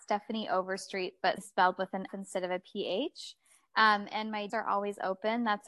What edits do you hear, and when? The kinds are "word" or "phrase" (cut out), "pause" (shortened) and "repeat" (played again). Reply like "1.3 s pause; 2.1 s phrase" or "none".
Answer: 1.4 s word; 2.1 s word; 4.5 s word